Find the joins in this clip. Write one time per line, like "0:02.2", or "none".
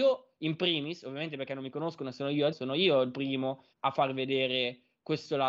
0:02.5
0:03.7